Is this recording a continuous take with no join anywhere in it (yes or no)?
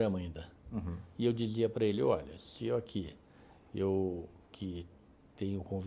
yes